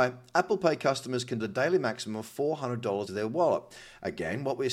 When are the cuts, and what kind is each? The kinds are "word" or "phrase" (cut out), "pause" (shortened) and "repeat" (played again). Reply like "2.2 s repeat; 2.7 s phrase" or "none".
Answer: 1.4 s word; 3.1 s word